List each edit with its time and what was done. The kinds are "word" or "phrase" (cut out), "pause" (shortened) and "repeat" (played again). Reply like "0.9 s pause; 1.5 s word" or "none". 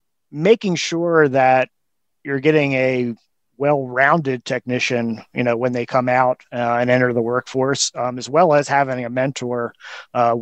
none